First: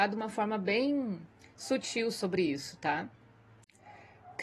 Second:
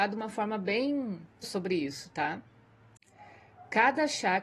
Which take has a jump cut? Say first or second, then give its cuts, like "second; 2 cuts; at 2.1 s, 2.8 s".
second; 1 cut; at 1.4 s